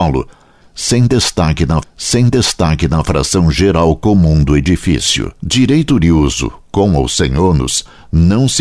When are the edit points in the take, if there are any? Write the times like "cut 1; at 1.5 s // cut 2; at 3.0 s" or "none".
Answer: cut 1; at 1.8 s // cut 2; at 5.4 s